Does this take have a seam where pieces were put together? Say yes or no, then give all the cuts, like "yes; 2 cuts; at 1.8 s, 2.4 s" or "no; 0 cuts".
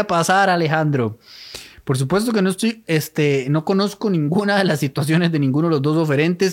no; 0 cuts